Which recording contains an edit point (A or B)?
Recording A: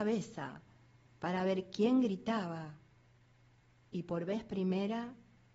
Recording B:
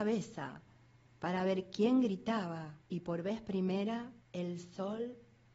B